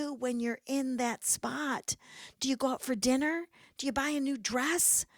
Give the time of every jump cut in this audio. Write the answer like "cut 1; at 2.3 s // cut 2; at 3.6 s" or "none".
none